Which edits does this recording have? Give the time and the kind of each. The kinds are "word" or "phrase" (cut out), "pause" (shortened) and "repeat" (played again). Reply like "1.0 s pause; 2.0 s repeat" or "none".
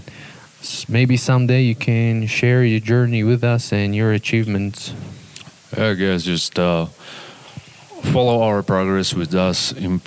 none